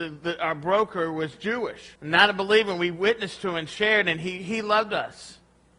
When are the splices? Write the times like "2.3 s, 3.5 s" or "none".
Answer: 1.9 s